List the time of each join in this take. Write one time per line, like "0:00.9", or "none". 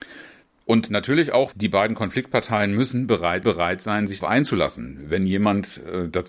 0:01.5
0:03.4
0:04.2

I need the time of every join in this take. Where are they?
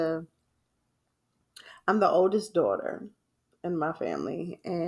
none

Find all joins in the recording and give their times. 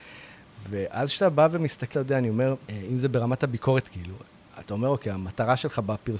0:01.9
0:02.6
0:03.8

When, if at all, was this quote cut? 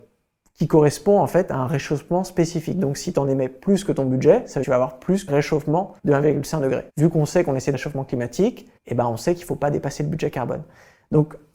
0:04.6
0:05.3
0:06.0
0:06.9
0:07.7
0:08.8

